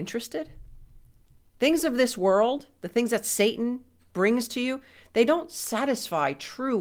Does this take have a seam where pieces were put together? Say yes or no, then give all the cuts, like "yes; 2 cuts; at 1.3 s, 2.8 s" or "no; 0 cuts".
no; 0 cuts